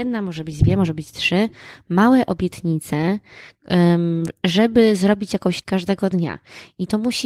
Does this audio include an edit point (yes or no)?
yes